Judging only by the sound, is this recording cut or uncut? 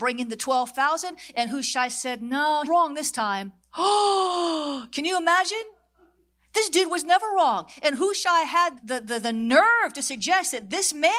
cut